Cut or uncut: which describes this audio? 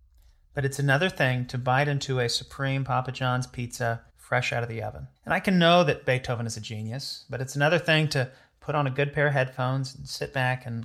cut